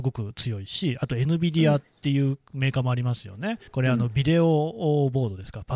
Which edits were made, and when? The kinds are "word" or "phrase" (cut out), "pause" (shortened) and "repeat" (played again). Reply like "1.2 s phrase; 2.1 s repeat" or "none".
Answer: 3.7 s pause